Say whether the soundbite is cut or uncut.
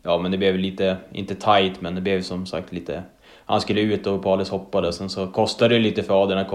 uncut